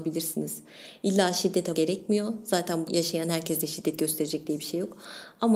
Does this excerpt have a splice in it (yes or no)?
yes